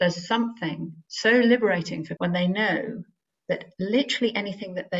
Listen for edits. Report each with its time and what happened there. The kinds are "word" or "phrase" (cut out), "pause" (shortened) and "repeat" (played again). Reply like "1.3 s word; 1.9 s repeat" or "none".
1.1 s pause; 2.2 s word